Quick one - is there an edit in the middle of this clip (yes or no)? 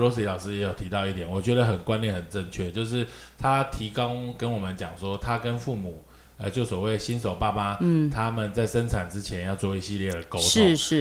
no